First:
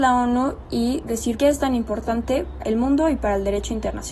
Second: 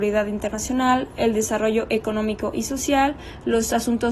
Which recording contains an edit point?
first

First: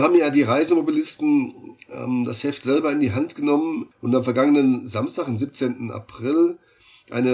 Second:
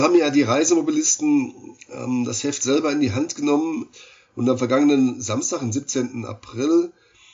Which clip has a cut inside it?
first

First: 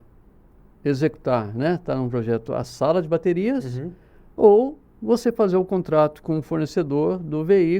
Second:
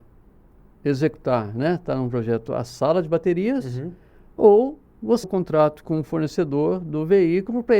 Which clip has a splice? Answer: second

